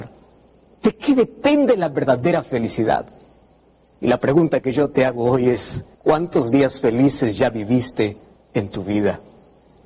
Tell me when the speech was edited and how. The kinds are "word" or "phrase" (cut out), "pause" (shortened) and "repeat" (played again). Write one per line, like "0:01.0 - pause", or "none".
0:05.9 - pause